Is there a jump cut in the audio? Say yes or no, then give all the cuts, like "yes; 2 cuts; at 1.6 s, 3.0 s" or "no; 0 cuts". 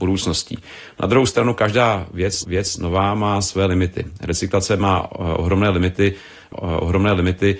yes; 2 cuts; at 2.4 s, 6.5 s